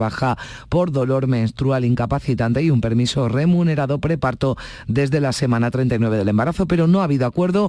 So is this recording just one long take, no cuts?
yes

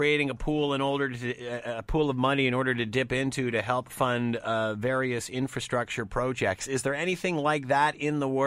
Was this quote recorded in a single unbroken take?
yes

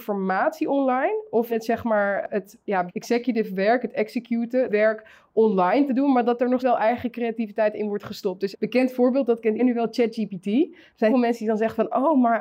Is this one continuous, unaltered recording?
no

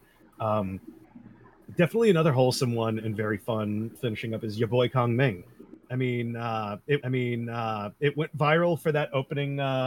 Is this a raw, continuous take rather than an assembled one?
no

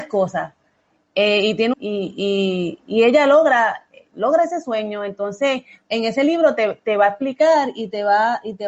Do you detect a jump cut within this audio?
yes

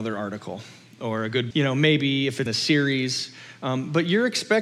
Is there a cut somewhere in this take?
yes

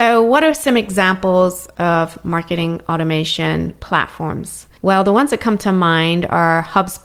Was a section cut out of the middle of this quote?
yes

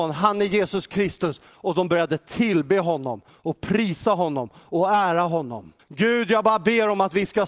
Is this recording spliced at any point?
yes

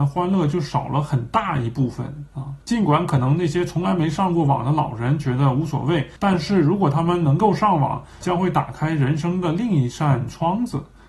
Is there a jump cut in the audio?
yes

